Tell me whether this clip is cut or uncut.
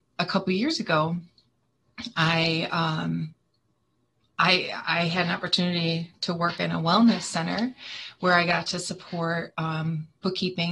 uncut